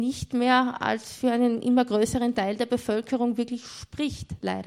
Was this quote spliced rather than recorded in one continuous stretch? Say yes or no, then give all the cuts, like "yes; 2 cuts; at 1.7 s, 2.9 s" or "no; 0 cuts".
no; 0 cuts